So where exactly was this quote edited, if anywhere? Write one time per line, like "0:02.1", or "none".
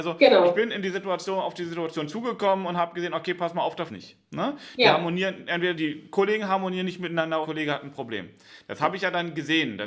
0:03.9
0:05.7
0:07.4